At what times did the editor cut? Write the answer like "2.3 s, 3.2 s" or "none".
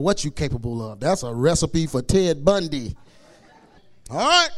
none